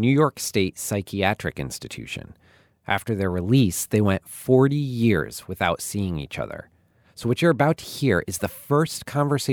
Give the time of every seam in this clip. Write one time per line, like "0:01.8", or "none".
none